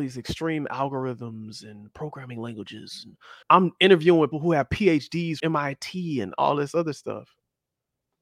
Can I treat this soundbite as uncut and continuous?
no; 3 cuts; at 3.4 s, 4.3 s, 5.4 s

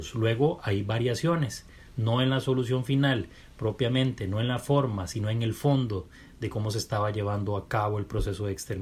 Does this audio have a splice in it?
no; 0 cuts

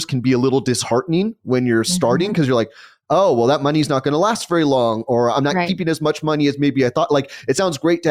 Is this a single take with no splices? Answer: yes; 0 cuts

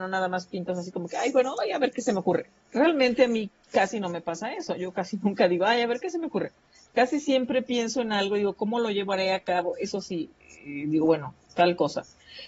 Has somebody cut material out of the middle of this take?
no; 0 cuts

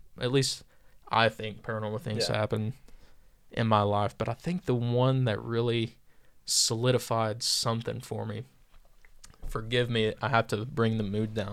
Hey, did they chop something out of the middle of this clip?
no; 0 cuts

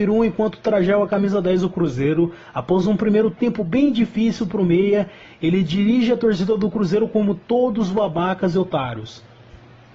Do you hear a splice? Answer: no; 0 cuts

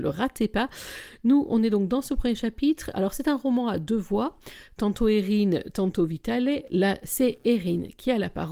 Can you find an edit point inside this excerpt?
no; 0 cuts

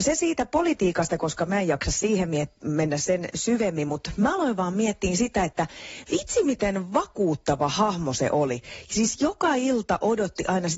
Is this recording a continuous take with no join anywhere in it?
yes; 0 cuts

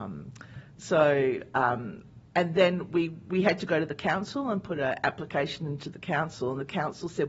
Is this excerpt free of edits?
yes; 0 cuts

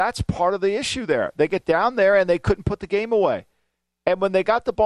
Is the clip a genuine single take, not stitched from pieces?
yes; 0 cuts

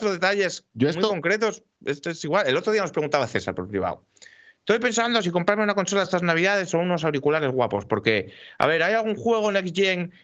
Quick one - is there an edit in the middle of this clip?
no; 0 cuts

